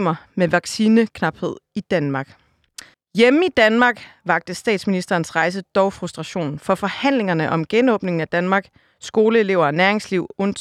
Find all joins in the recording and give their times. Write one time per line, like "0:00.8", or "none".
0:02.9